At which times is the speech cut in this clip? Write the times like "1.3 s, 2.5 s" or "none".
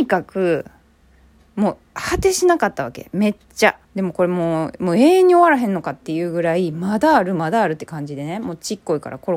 3.4 s, 3.8 s